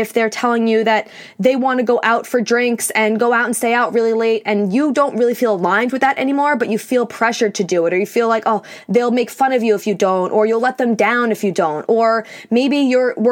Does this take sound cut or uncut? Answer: uncut